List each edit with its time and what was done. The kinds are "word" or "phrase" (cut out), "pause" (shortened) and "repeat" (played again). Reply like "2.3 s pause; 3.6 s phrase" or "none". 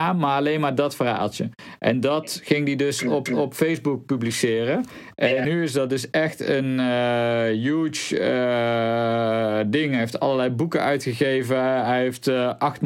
3.3 s repeat; 5.4 s word

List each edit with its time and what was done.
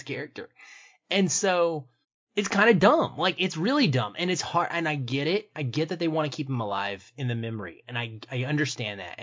2.0 s pause

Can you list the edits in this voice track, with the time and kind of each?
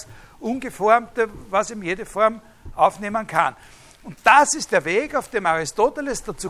none

